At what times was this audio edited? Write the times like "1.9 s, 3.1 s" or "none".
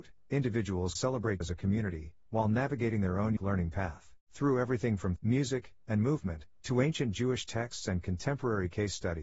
1.0 s, 1.4 s, 3.4 s, 4.2 s, 5.2 s